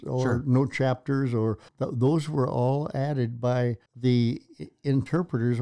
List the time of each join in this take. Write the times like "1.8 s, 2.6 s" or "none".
1.7 s, 3.9 s

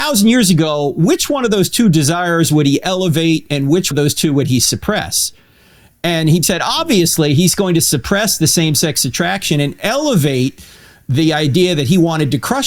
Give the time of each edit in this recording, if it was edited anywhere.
3.9 s, 6.4 s

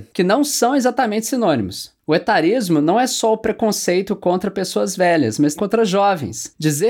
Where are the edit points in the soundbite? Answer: 5.6 s

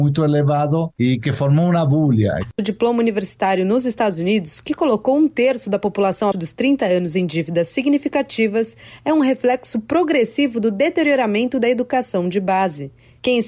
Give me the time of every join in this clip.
6.3 s

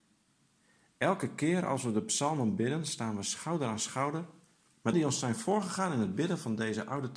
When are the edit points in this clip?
4.9 s

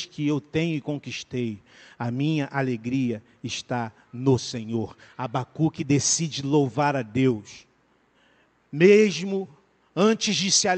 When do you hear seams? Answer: none

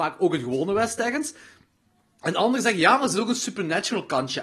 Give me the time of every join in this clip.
none

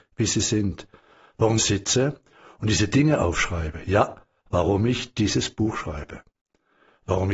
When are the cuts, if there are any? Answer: 1.6 s

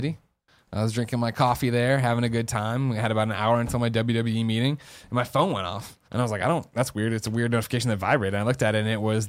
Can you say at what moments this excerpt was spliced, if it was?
6.0 s

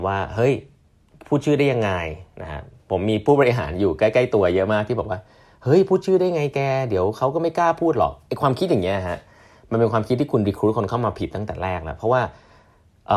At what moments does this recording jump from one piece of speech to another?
none

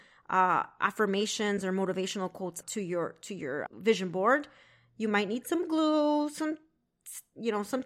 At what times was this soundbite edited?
2.6 s, 3.7 s

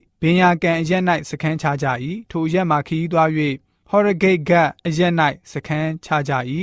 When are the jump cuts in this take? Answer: 4.8 s

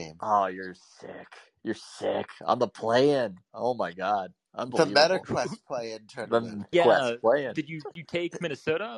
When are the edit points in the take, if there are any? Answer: 6.7 s, 7.9 s

